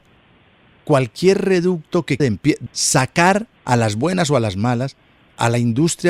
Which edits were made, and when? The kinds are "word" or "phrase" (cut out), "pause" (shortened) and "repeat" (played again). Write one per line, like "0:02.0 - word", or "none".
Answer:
0:02.2 - word
0:02.7 - phrase
0:03.6 - pause

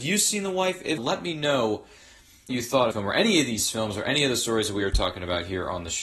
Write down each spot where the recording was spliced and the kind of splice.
0:01.0 - word
0:02.5 - word
0:02.9 - phrase

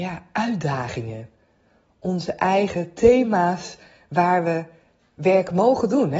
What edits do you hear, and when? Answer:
none

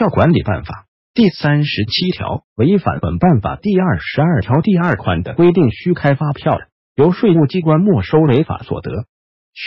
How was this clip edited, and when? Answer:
0:02.5 - pause

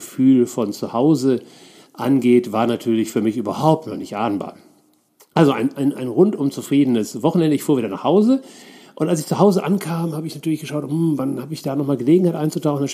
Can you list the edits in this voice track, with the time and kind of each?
none

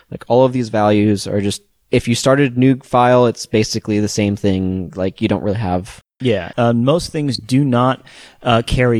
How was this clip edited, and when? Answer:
none

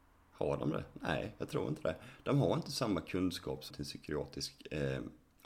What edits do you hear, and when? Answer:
0:03.7 - phrase

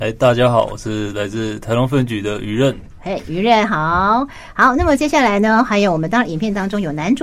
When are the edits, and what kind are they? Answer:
0:05.7 - word

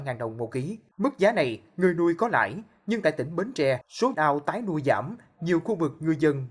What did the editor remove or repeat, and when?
0:04.1 - phrase

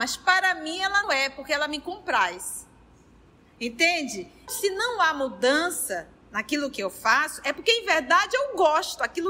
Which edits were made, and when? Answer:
0:01.0 - word

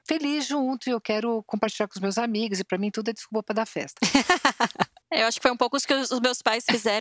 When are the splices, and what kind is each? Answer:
none

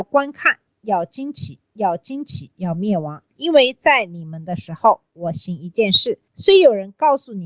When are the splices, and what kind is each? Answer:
0:01.6 - repeat

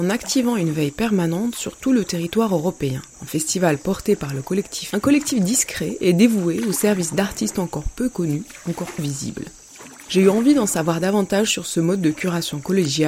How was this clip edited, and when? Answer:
0:04.9 - word
0:09.0 - word

